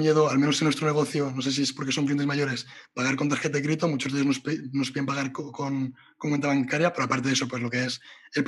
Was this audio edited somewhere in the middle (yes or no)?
no